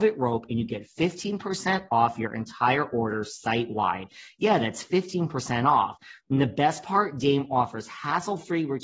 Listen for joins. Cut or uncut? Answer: uncut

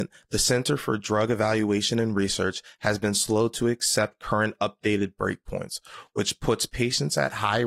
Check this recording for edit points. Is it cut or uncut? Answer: uncut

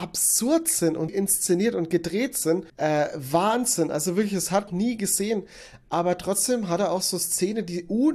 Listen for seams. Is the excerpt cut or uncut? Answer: cut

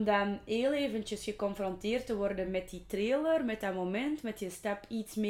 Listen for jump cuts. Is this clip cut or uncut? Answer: uncut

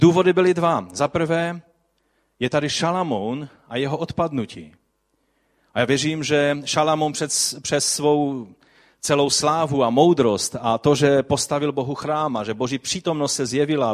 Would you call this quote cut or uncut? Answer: uncut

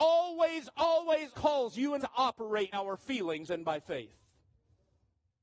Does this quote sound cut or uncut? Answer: cut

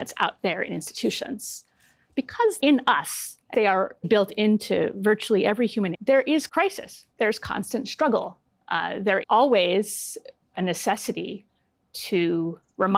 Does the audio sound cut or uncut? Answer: cut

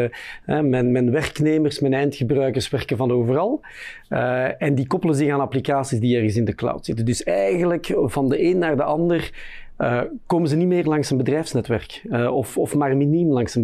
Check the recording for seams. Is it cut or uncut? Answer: uncut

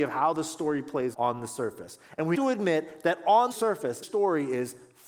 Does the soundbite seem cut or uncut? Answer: cut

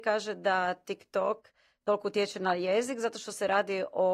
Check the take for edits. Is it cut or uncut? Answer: uncut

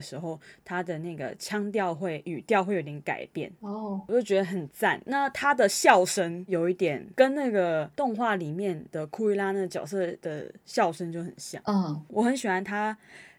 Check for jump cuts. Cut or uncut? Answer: uncut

